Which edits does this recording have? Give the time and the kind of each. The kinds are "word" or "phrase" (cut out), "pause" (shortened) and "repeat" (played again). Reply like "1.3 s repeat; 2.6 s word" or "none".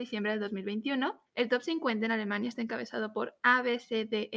1.3 s pause